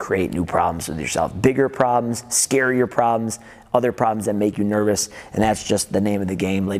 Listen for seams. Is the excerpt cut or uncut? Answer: uncut